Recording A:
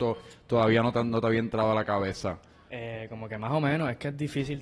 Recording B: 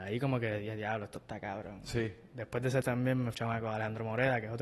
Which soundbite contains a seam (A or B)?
B